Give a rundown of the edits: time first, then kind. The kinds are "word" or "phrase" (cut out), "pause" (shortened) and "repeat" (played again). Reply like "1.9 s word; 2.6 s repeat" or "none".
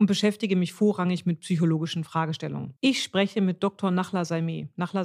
2.8 s pause